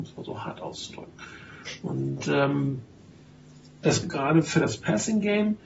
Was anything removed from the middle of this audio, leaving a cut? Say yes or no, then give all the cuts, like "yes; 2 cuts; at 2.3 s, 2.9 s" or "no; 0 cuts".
yes; 1 cut; at 4.0 s